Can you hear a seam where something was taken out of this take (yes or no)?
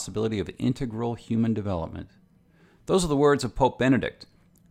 no